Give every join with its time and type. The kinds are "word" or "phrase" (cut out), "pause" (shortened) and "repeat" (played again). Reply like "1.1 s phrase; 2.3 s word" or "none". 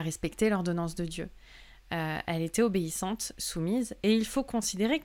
none